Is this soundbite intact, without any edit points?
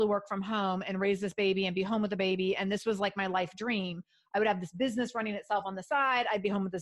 yes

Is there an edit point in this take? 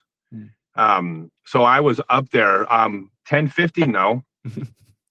yes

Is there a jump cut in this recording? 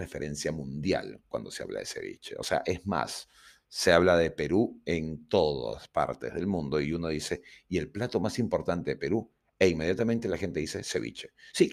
no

